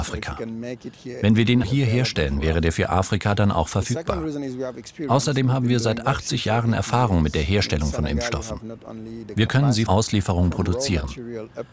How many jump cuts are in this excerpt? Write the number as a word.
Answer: two